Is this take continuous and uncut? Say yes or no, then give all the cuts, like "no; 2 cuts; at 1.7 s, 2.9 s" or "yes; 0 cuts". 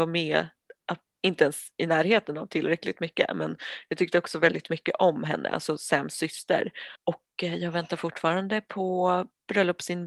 no; 1 cut; at 7.0 s